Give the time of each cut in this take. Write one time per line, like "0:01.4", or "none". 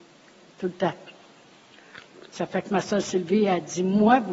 none

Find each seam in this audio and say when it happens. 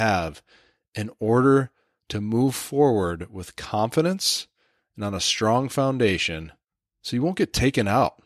none

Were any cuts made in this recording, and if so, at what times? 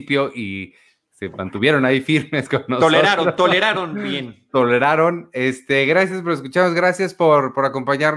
none

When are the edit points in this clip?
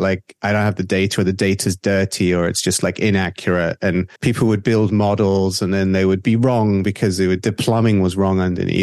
0:04.2

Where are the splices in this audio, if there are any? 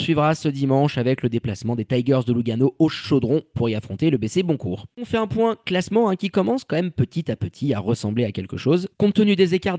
none

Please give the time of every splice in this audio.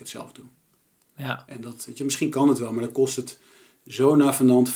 none

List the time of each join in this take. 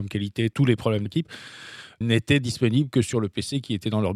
0:01.1
0:02.0

